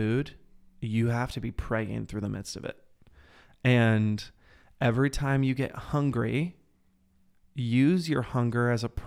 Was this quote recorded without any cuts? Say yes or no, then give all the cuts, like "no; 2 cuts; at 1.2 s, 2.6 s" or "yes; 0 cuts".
yes; 0 cuts